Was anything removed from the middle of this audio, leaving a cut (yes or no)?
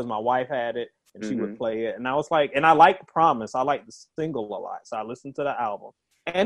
no